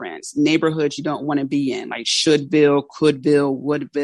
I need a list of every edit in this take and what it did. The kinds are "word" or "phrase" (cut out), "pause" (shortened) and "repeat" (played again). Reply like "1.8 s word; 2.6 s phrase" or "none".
none